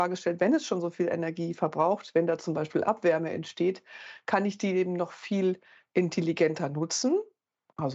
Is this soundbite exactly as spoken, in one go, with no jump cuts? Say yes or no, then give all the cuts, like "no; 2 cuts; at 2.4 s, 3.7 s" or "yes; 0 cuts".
yes; 0 cuts